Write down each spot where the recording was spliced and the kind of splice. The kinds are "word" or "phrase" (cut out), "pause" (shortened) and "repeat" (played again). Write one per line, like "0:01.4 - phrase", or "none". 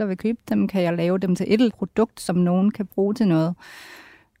0:01.7 - word